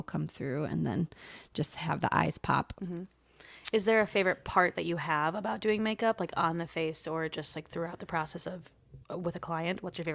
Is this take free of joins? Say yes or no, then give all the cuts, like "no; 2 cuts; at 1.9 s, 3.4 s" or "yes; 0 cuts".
no; 1 cut; at 9.0 s